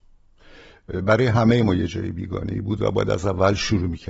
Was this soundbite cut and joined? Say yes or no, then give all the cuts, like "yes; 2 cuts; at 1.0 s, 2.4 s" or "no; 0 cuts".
no; 0 cuts